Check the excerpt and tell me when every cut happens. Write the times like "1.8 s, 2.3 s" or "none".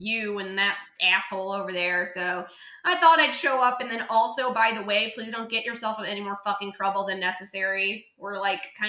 none